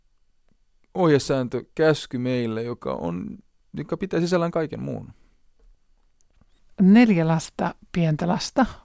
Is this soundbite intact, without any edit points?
yes; 0 cuts

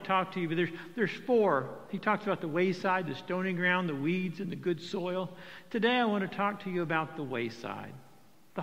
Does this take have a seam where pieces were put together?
no; 0 cuts

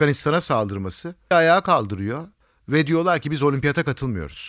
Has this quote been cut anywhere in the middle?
yes; 1 cut; at 1.3 s

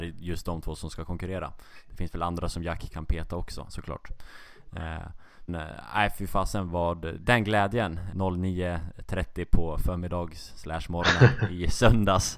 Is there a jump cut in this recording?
yes; 2 cuts; at 5.5 s, 8.1 s

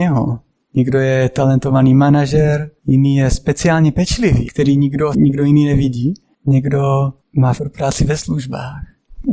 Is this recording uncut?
no; 4 cuts; at 2.8 s, 4.5 s, 5.1 s, 7.6 s

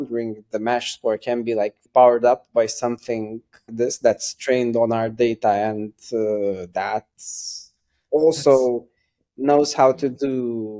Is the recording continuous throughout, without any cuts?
no; 2 cuts; at 1.9 s, 3.7 s

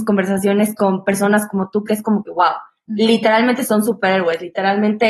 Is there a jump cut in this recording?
no; 0 cuts

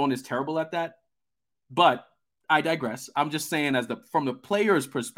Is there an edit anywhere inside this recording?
no; 0 cuts

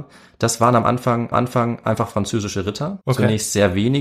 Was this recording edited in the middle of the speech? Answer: yes; 2 cuts; at 1.3 s, 3.0 s

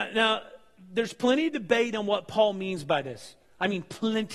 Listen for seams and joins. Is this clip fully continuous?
yes; 0 cuts

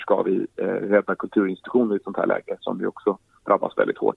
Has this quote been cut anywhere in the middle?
no; 0 cuts

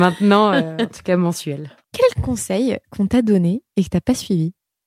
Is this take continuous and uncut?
no; 1 cut; at 1.8 s

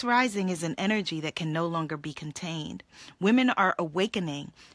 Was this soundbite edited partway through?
no; 0 cuts

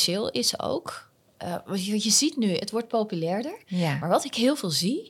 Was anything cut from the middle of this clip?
no; 0 cuts

